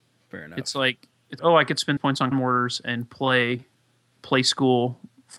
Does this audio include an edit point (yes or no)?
yes